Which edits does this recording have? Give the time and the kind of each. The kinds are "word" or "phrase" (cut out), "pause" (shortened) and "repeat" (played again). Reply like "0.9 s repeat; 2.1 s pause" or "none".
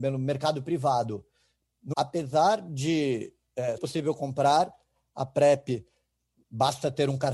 1.9 s word; 3.8 s word